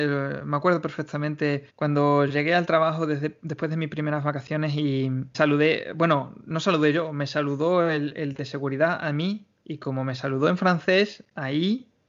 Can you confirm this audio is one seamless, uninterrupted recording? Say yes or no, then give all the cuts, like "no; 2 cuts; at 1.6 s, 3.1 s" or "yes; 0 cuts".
no; 1 cut; at 1.7 s